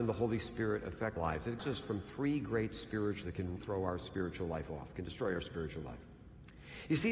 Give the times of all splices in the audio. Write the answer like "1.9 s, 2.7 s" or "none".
1.2 s, 1.6 s, 3.2 s, 3.6 s

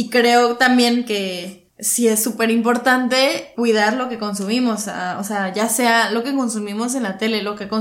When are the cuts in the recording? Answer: 1.7 s, 3.5 s

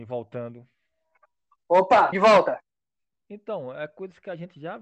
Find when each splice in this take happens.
2.1 s

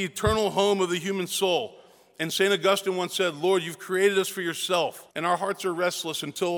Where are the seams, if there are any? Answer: 5.1 s

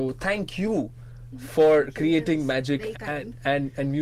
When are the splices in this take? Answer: 2.9 s

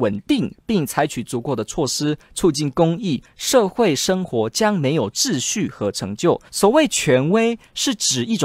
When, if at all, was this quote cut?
6.5 s

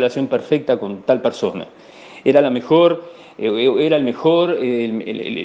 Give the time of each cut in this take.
none

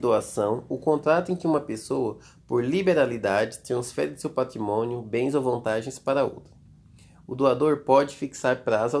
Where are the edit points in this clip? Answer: none

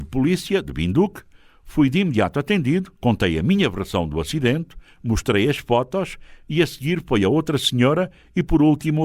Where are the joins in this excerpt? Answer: 3.0 s

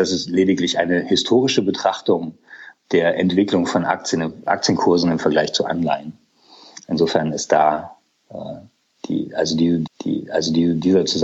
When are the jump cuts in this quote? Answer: 9.9 s

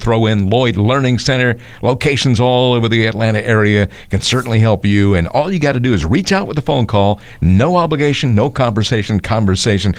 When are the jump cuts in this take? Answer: none

